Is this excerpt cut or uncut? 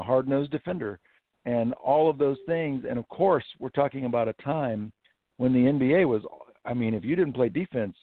uncut